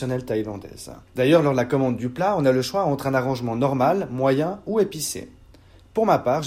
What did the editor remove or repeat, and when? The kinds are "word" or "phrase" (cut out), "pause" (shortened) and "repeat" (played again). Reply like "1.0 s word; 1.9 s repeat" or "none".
1.1 s pause